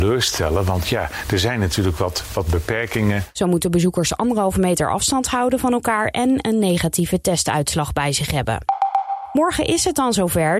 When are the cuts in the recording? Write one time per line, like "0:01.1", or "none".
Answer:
none